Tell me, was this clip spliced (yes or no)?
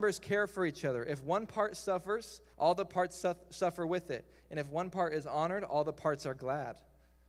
yes